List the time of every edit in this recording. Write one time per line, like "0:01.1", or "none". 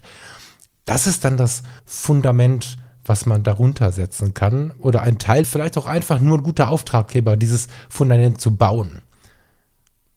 0:01.8
0:05.4

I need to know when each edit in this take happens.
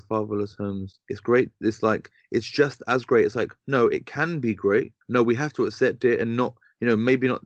0:01.0
0:05.0

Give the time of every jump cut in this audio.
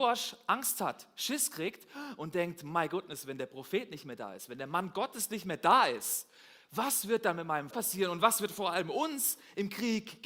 0:07.7

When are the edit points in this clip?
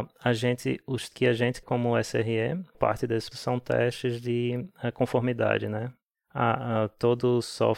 0:01.1
0:01.6
0:02.7
0:03.3

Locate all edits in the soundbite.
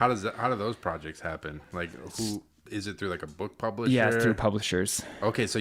none

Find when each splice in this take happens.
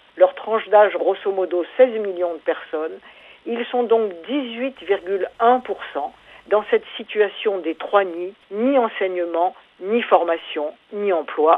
0:01.0
0:08.4

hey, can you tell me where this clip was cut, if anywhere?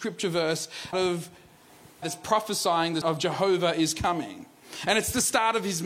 0:00.9
0:02.0
0:03.0

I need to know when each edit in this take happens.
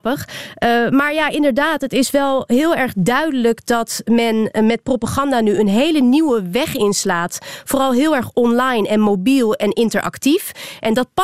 none

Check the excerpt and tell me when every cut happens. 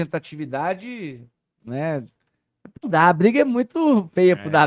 0:02.8

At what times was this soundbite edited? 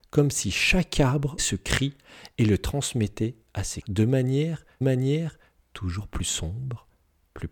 0:01.4
0:03.8
0:04.8

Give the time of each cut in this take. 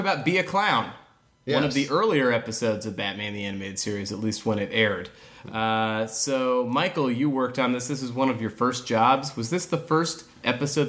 none

